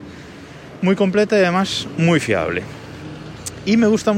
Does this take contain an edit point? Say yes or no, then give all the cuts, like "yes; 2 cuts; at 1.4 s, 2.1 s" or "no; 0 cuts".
no; 0 cuts